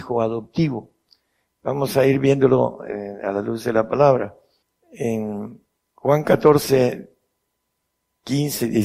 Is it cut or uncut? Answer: uncut